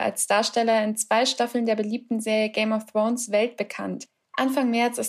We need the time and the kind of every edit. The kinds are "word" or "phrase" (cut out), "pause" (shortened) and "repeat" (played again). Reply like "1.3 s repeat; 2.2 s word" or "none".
none